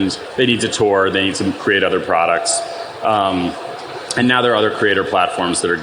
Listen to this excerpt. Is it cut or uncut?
uncut